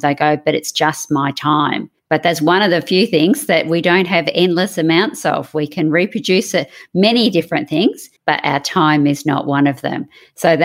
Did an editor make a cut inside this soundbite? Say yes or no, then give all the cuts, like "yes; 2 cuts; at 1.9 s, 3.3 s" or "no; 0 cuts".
yes; 2 cuts; at 2.0 s, 8.2 s